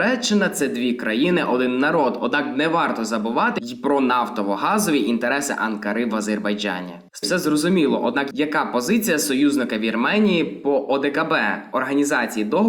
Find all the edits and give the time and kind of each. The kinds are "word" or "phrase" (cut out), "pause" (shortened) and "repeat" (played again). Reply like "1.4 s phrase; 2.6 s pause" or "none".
7.2 s word